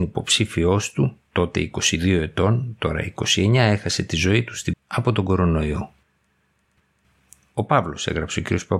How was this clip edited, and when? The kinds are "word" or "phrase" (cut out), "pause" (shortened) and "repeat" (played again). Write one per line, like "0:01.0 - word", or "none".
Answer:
0:01.3 - pause
0:04.7 - word